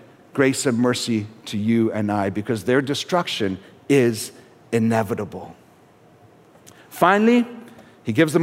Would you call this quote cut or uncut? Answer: uncut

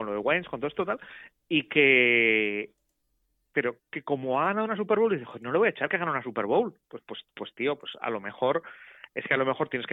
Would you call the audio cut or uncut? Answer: cut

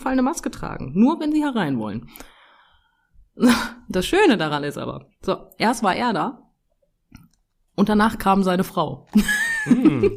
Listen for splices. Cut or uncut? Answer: uncut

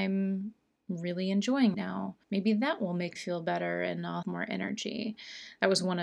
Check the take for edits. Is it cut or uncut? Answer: cut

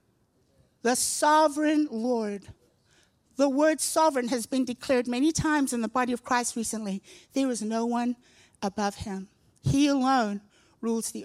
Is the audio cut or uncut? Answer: uncut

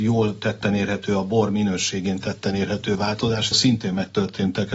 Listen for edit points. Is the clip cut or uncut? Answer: cut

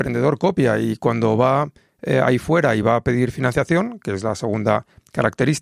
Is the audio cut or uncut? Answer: uncut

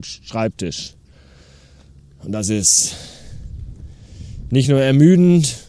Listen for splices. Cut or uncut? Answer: uncut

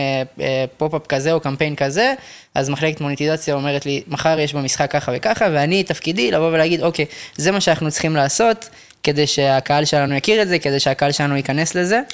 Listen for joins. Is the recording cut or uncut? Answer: uncut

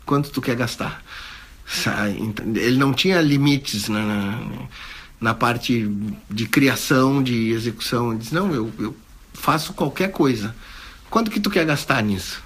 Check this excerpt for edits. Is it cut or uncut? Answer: uncut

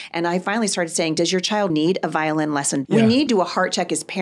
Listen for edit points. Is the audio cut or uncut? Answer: cut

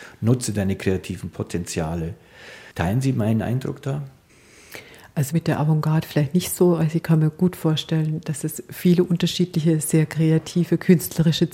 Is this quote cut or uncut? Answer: cut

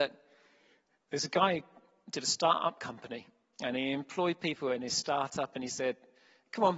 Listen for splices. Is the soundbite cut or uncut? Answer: uncut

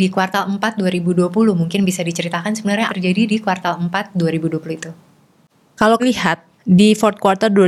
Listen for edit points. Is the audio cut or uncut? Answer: cut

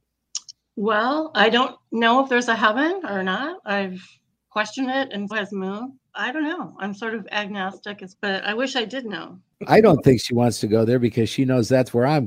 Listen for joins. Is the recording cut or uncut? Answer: cut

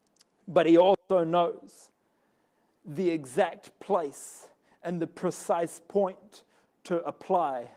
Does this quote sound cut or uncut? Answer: uncut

